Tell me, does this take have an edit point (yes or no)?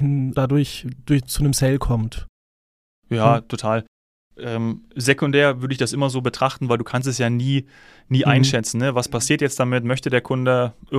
no